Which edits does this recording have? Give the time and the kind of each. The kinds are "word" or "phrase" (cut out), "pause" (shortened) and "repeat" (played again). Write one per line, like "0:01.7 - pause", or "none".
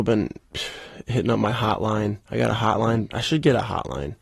0:02.2 - pause